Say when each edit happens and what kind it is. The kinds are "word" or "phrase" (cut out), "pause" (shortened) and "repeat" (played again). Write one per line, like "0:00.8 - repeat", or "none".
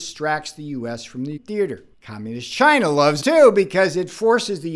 0:01.4 - word
0:01.9 - pause
0:03.2 - word

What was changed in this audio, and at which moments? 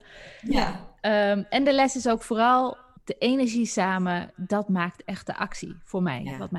0:03.0 - pause

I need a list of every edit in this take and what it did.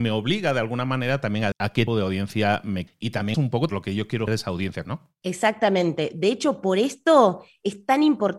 0:01.5 - word
0:01.9 - word
0:02.9 - phrase
0:03.3 - word
0:03.7 - phrase
0:04.3 - phrase
0:04.8 - word

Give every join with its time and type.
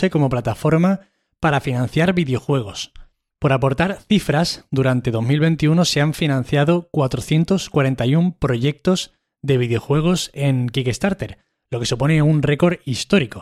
none

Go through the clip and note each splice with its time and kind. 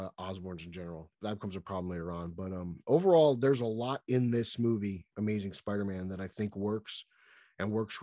none

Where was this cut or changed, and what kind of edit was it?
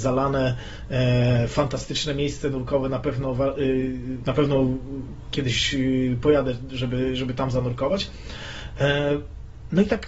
none

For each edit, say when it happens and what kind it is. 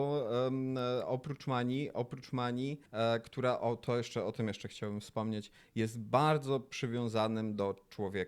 0:02.9 - pause

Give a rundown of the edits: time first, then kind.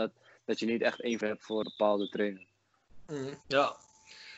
0:01.2 - word
0:01.6 - word
0:03.4 - pause

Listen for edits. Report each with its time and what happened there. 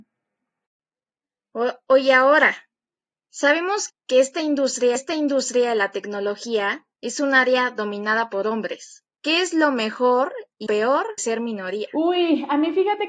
0:03.9 - word
0:05.0 - repeat
0:06.9 - pause
0:09.1 - pause
0:10.7 - word
0:11.2 - word

